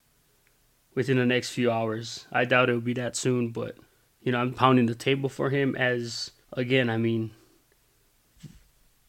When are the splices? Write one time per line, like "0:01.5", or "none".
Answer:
0:03.9
0:04.5
0:06.4

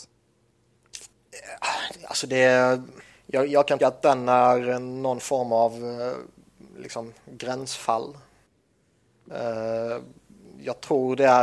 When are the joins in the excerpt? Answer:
0:03.0
0:03.8
0:07.2

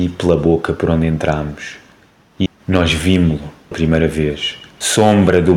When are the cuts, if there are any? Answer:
0:02.5
0:03.7

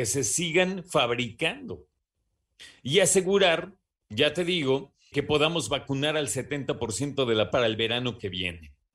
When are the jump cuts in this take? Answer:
0:07.5

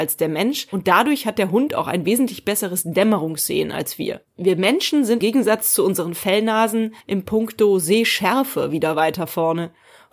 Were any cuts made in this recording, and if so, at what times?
0:04.3
0:05.2
0:07.0

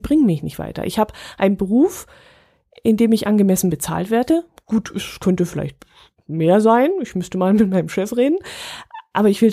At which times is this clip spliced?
none

